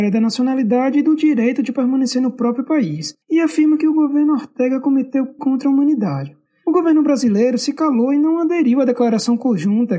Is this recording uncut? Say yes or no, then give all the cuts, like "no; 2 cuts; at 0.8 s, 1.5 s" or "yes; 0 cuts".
no; 3 cuts; at 3.2 s, 5.4 s, 6.5 s